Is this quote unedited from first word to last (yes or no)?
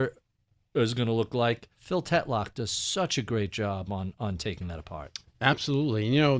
no